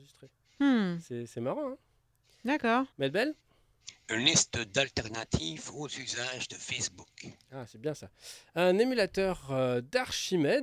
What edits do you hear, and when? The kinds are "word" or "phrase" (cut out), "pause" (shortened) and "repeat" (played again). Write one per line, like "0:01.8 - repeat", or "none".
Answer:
0:02.9 - pause